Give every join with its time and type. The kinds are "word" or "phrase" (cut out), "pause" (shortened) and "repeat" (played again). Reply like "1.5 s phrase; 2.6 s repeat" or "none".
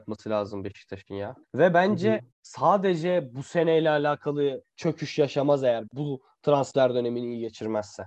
1.4 s pause; 2.3 s pause; 4.6 s word; 5.9 s word